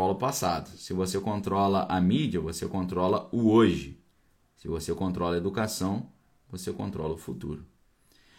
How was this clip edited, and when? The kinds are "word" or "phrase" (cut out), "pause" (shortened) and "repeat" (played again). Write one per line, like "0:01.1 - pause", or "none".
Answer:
none